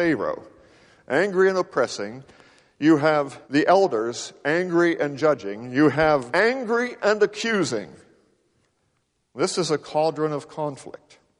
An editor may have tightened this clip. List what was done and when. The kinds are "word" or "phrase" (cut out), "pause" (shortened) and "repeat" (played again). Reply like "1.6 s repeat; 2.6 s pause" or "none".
3.4 s pause; 6.3 s word